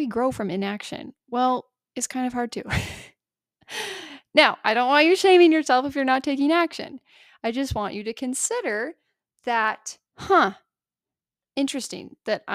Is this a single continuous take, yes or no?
no